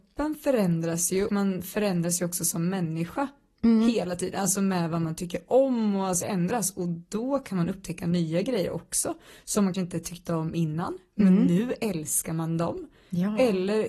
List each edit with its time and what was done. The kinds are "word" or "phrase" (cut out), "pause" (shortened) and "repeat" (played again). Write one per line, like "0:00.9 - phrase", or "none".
0:01.3 - word
0:06.2 - word
0:09.7 - word